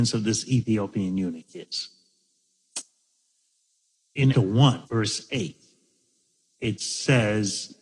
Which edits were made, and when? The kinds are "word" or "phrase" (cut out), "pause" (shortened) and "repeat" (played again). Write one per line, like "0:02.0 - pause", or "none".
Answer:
0:04.3 - phrase
0:04.9 - pause